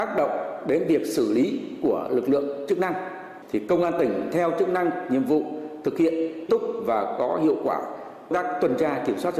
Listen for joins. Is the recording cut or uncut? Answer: cut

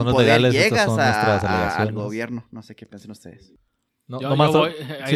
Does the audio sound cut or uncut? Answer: uncut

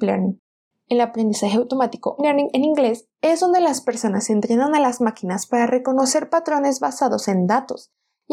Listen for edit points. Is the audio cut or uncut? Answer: cut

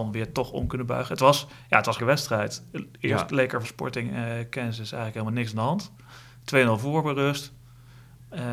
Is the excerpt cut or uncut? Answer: cut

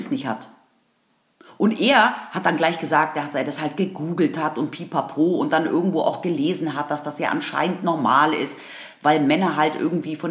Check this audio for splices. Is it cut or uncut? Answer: uncut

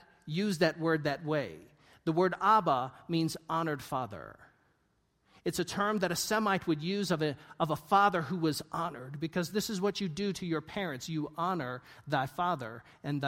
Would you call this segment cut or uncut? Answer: uncut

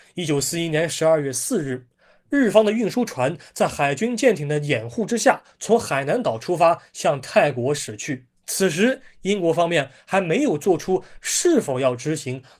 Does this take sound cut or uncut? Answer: cut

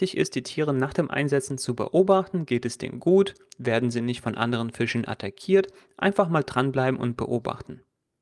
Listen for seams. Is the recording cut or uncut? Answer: uncut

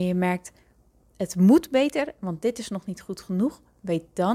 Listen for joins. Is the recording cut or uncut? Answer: uncut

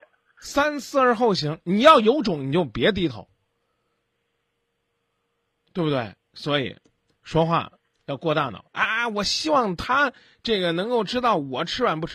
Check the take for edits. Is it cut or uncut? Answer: uncut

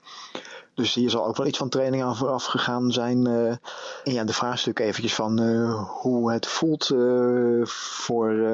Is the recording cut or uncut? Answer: uncut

